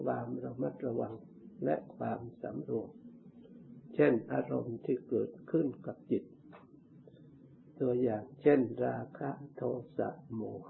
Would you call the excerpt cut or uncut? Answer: uncut